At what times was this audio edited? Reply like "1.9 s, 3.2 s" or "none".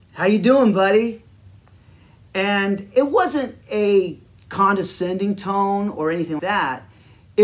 3.6 s, 6.4 s